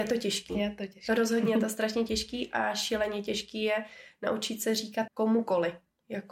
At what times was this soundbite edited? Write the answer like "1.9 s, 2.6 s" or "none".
5.1 s